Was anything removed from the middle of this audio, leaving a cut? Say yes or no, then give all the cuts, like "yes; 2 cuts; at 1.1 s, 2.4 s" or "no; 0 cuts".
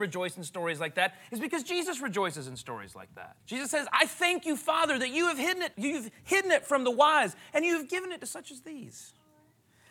yes; 2 cuts; at 3.4 s, 5.7 s